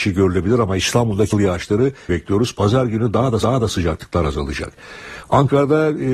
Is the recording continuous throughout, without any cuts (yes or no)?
no